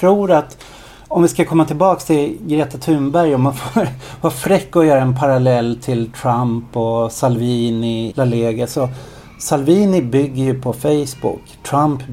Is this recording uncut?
no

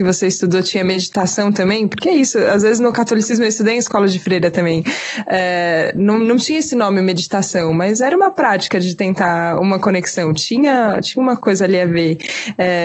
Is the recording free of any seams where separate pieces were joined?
yes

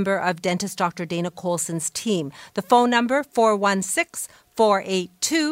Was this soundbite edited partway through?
no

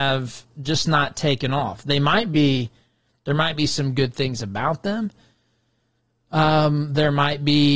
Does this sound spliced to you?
no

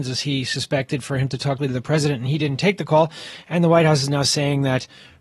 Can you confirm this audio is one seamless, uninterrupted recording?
no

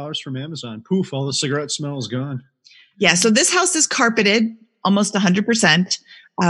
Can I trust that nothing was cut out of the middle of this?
yes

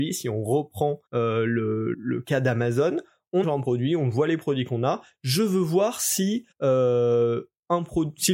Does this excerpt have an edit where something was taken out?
yes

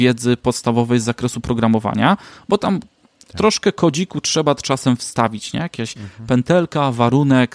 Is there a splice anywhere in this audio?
no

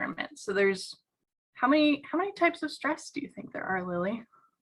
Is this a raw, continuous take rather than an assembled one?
no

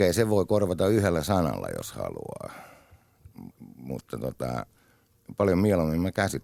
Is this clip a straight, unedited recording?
no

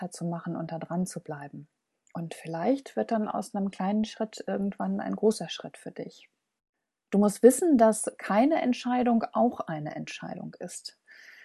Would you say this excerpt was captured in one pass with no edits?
yes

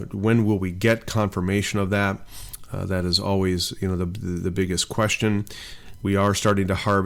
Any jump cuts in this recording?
no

